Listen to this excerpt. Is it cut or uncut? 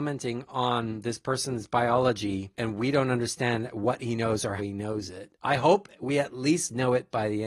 cut